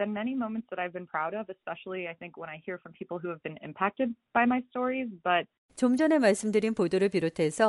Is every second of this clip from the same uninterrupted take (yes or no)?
yes